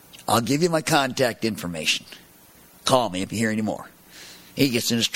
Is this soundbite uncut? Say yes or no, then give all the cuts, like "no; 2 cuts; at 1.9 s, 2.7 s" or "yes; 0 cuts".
yes; 0 cuts